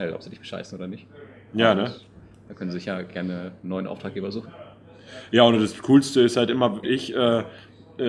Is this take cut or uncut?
cut